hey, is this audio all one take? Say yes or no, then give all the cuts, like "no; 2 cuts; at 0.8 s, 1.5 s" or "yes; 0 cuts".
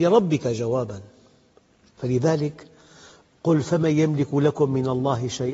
yes; 0 cuts